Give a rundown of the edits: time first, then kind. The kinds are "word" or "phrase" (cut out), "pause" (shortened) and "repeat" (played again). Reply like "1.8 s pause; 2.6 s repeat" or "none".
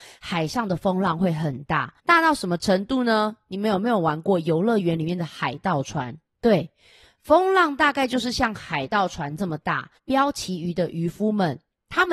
2.0 s pause; 6.3 s pause; 10.0 s pause